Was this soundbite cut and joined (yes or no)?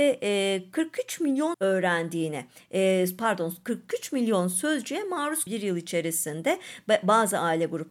yes